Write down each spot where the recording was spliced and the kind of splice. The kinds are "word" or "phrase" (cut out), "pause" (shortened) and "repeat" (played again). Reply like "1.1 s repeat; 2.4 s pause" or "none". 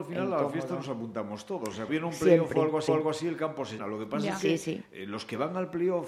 1.9 s word; 2.9 s repeat; 3.8 s word